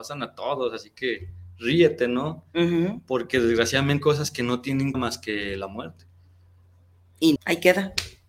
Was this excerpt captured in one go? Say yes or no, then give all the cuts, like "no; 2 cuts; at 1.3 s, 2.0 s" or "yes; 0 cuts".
no; 3 cuts; at 4.0 s, 4.9 s, 7.4 s